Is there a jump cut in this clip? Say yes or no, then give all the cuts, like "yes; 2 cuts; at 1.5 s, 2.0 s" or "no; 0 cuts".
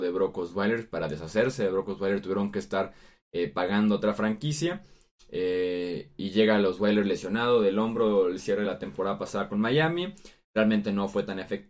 no; 0 cuts